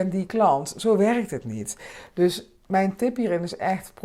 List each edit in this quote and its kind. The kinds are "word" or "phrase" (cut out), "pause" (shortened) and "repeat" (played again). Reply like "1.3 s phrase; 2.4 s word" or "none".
none